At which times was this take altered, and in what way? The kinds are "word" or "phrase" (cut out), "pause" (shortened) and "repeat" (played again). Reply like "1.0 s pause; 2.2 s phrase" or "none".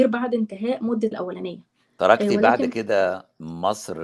1.1 s phrase; 1.8 s pause